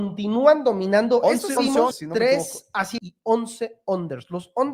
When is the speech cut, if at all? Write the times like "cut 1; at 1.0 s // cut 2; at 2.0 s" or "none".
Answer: cut 1; at 1.6 s // cut 2; at 1.9 s // cut 3; at 3.0 s

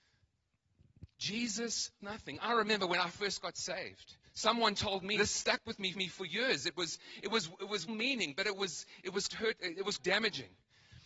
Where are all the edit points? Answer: cut 1; at 2.0 s // cut 2; at 4.2 s // cut 3; at 5.2 s // cut 4; at 5.9 s // cut 5; at 7.9 s // cut 6; at 9.3 s // cut 7; at 10.0 s

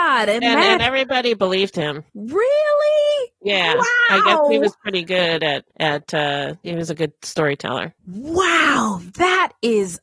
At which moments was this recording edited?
cut 1; at 2.1 s // cut 2; at 8.0 s

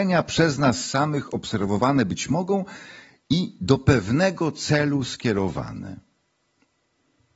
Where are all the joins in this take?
none

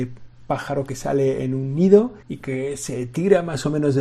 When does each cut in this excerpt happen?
cut 1; at 2.2 s

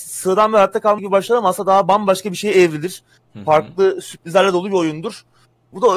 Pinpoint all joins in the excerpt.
cut 1; at 1.0 s

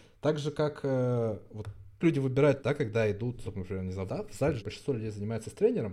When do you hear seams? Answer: cut 1; at 2.0 s // cut 2; at 2.6 s // cut 3; at 3.4 s // cut 4; at 4.1 s // cut 5; at 4.6 s

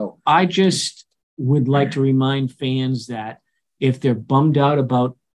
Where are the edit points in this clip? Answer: none

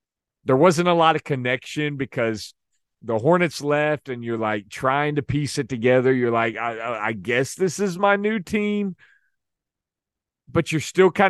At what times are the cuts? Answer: none

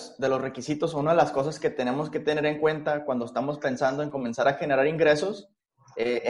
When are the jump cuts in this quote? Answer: none

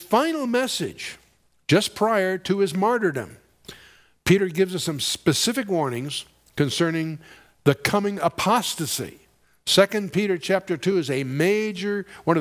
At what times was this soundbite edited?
none

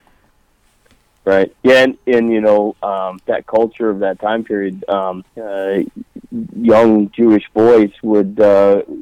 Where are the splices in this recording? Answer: cut 1; at 1.6 s // cut 2; at 5.3 s

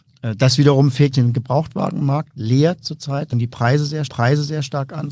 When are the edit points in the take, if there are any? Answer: cut 1; at 1.1 s // cut 2; at 3.3 s // cut 3; at 4.1 s

